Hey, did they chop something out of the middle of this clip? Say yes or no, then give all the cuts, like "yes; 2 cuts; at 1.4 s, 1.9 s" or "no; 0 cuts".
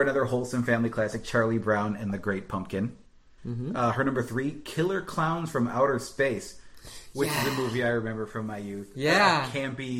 no; 0 cuts